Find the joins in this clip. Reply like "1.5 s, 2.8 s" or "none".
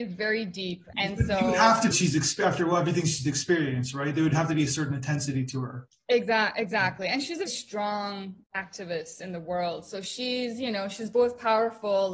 0.9 s, 1.9 s, 6.0 s, 7.5 s, 8.4 s